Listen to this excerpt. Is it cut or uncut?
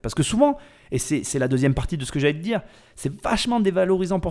uncut